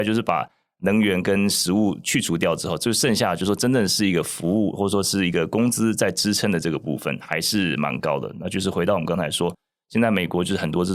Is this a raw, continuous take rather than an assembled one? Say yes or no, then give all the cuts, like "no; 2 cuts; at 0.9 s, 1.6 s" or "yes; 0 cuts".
yes; 0 cuts